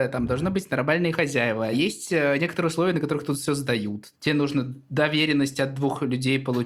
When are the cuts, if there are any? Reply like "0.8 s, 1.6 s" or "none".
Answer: none